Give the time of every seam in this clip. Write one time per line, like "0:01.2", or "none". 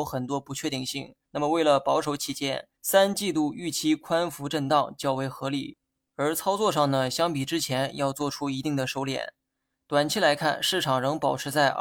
0:01.2
0:02.8